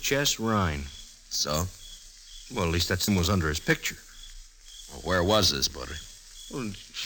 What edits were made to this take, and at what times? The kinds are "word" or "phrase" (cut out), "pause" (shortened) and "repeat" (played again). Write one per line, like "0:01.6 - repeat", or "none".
0:03.1 - word
0:05.7 - word